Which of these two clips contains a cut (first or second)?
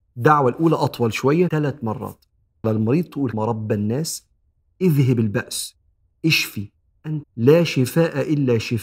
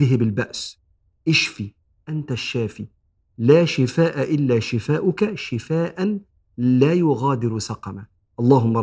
first